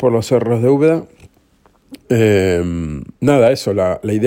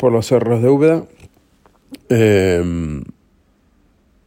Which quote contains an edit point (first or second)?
first